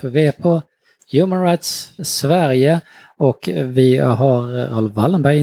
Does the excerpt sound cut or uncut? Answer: cut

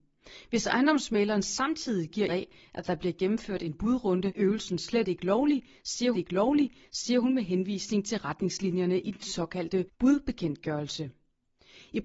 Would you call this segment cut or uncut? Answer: cut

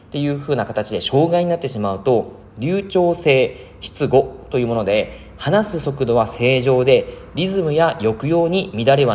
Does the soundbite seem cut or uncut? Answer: uncut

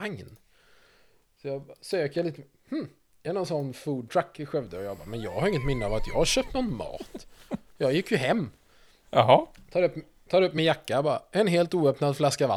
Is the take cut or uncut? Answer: uncut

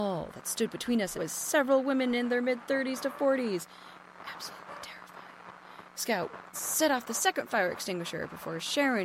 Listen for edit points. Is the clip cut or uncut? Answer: cut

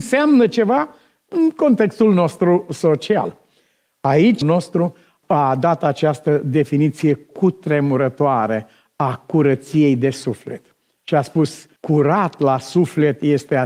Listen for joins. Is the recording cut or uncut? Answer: cut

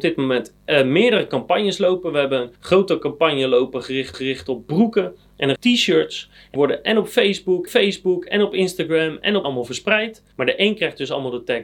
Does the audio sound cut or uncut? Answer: cut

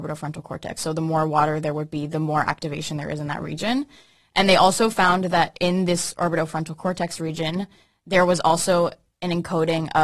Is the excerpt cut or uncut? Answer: uncut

